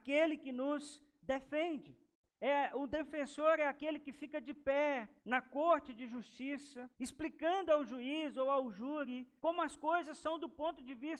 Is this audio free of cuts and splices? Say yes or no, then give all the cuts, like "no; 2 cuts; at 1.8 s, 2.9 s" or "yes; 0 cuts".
no; 4 cuts; at 2.1 s, 5.2 s, 6.9 s, 9.4 s